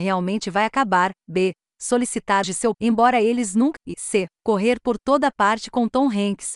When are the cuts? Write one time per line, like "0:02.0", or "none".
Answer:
0:02.4
0:02.7
0:03.8